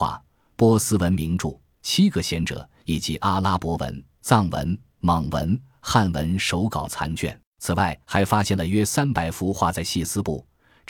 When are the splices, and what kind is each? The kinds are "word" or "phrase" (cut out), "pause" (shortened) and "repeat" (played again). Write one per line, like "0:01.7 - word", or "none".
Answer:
0:07.5 - pause
0:08.0 - pause